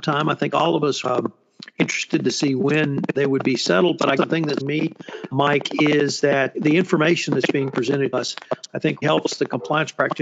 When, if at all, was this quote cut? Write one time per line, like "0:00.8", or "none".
0:01.0
0:03.1
0:04.2
0:04.6
0:05.3
0:06.5
0:08.1
0:09.0